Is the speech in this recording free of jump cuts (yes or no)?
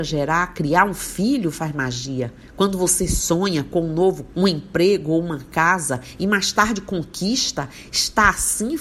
no